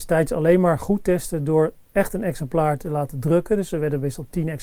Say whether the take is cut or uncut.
uncut